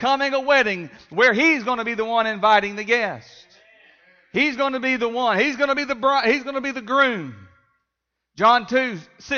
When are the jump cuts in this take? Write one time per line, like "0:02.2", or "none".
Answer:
none